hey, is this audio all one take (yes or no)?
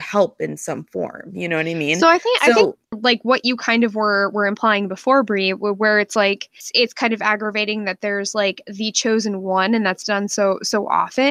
no